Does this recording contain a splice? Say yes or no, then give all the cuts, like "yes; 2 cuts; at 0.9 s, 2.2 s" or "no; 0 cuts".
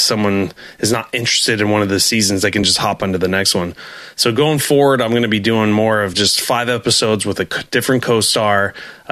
no; 0 cuts